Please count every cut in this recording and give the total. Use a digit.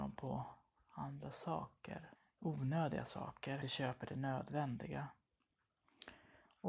2